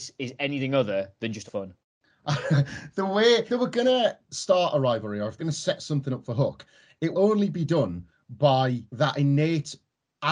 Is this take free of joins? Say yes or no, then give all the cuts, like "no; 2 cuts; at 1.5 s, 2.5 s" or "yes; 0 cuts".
no; 6 cuts; at 1.5 s, 1.8 s, 3.5 s, 5.4 s, 7.1 s, 8.9 s